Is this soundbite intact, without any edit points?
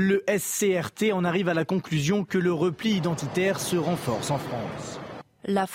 yes; 0 cuts

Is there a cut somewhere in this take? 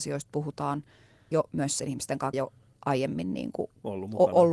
yes; 3 cuts; at 1.3 s, 1.8 s, 2.3 s

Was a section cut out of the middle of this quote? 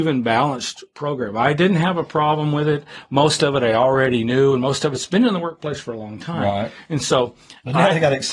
no; 0 cuts

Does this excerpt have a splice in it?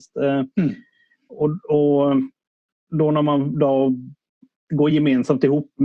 no; 0 cuts

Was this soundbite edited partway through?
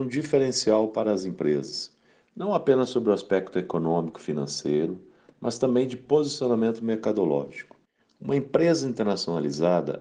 no; 0 cuts

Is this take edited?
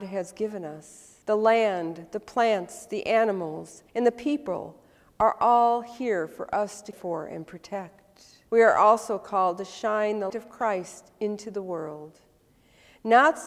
yes; 5 cuts; at 1.2 s, 3.9 s, 6.9 s, 8.5 s, 10.3 s

